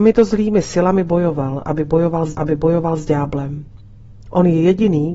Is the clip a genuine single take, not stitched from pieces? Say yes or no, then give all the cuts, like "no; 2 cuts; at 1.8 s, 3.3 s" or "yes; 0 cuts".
no; 1 cut; at 2.3 s